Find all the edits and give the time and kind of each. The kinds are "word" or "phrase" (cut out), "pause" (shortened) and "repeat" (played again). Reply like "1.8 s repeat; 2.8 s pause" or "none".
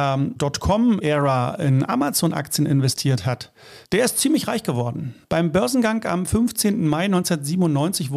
3.8 s pause; 5.2 s pause